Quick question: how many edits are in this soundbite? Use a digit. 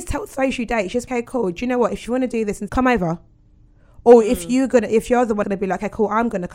3